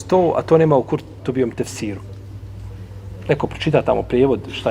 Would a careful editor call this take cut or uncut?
uncut